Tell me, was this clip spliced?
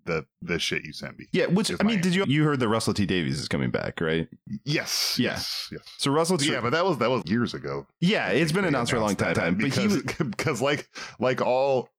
yes; 4 cuts; at 2.2 s, 6.4 s, 7.2 s, 9.3 s

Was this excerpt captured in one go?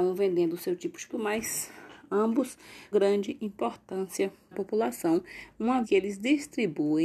no; 4 cuts; at 1.1 s, 2.9 s, 4.5 s, 5.8 s

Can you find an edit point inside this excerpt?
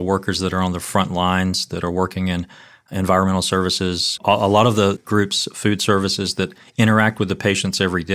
yes; 1 cut; at 4.2 s

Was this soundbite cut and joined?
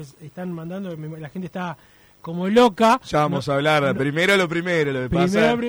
no; 0 cuts

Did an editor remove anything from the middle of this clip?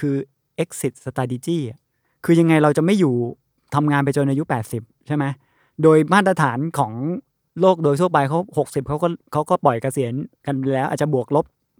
no; 0 cuts

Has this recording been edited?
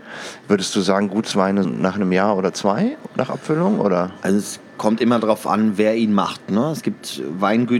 yes; 1 cut; at 1.6 s

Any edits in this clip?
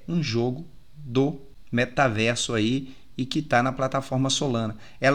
no; 0 cuts

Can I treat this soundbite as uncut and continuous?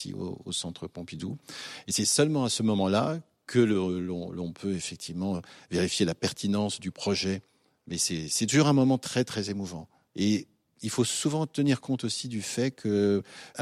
yes; 0 cuts

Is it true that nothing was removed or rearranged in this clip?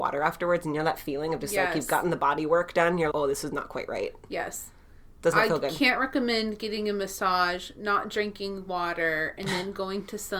no; 1 cut; at 3.1 s

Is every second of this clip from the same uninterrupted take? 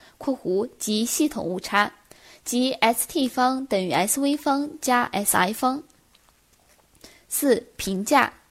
yes; 0 cuts

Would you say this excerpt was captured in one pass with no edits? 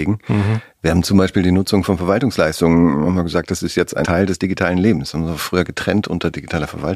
no; 1 cut; at 4.0 s

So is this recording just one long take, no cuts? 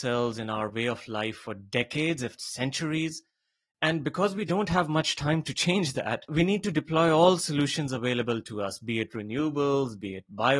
no; 1 cut; at 2.4 s

